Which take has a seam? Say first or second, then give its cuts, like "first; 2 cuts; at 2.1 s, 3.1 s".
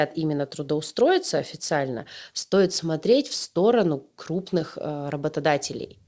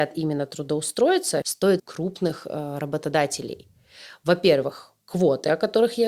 second; 2 cuts; at 1.4 s, 1.8 s